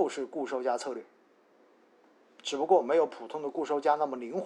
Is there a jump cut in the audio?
no; 0 cuts

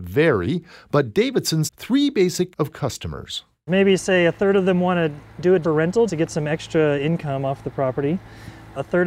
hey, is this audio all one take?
no; 4 cuts; at 1.7 s, 2.5 s, 5.6 s, 6.1 s

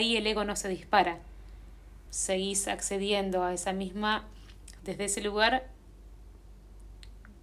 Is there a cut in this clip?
yes; 2 cuts; at 2.1 s, 4.8 s

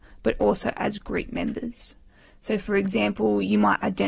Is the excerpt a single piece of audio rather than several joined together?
yes; 0 cuts

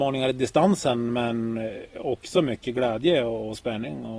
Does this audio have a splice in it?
no; 0 cuts

